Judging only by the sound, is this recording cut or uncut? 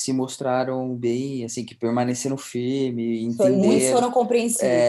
uncut